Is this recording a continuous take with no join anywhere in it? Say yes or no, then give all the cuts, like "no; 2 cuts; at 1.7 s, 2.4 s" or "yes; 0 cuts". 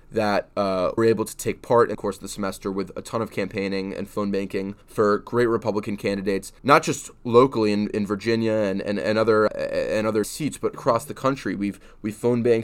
no; 7 cuts; at 1.0 s, 1.9 s, 4.8 s, 6.6 s, 9.5 s, 10.2 s, 10.7 s